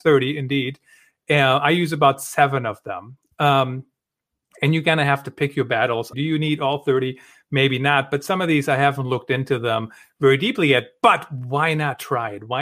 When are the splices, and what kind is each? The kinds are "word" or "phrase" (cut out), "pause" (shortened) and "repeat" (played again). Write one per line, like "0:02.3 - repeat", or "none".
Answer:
0:06.1 - word